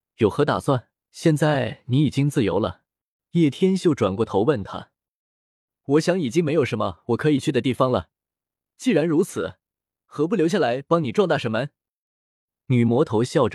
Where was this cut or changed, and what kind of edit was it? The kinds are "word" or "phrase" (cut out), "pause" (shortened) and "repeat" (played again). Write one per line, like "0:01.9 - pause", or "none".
0:01.0 - pause
0:03.2 - pause